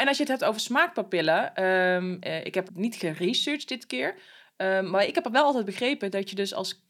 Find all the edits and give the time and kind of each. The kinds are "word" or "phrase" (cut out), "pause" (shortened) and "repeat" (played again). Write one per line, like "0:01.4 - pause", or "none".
0:02.7 - word